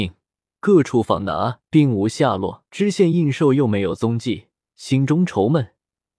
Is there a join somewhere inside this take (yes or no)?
yes